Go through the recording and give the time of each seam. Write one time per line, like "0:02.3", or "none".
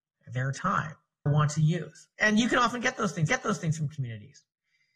0:01.3
0:02.1
0:03.3